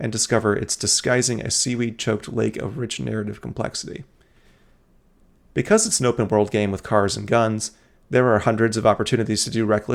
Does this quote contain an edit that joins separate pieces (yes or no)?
no